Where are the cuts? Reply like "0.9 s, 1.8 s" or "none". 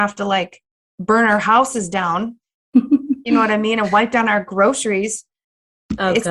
none